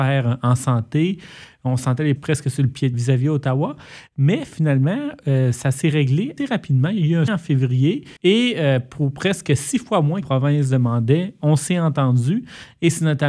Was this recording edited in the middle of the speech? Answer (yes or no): yes